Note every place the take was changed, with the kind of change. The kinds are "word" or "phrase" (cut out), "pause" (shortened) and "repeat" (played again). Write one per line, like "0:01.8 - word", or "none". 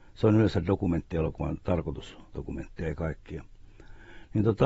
0:02.3 - word